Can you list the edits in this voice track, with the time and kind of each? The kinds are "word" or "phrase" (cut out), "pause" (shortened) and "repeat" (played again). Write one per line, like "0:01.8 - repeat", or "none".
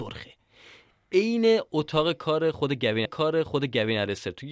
0:03.1 - repeat